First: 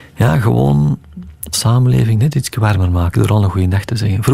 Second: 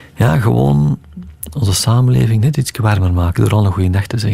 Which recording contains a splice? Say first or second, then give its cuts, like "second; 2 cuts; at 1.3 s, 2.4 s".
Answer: first; 1 cut; at 1.5 s